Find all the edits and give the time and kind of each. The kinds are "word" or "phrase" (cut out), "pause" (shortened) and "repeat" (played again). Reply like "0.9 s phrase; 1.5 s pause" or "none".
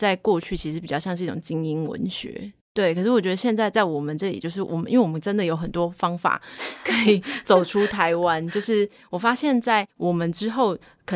2.6 s pause; 9.9 s pause